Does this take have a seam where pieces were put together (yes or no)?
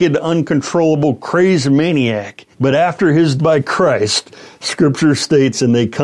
yes